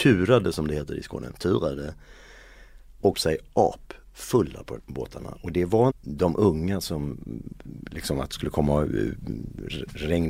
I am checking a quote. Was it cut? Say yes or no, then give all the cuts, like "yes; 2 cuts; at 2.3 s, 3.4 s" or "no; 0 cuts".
yes; 3 cuts; at 3.1 s, 4.8 s, 5.9 s